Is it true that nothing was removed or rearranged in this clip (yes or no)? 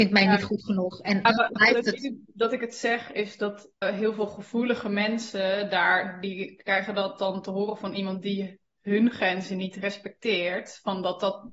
no